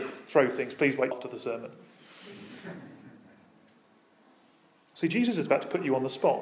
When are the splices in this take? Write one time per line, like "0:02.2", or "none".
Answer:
0:01.1